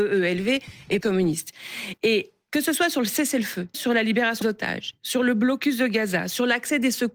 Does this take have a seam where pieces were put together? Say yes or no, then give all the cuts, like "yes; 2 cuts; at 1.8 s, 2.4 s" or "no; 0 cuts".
yes; 3 cuts; at 1.0 s, 3.7 s, 4.4 s